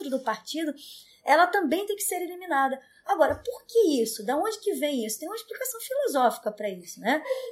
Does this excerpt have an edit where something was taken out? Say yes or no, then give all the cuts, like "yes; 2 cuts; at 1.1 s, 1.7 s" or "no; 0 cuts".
no; 0 cuts